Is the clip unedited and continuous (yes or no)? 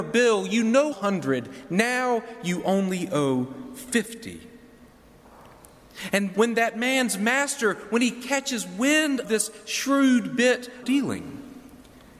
no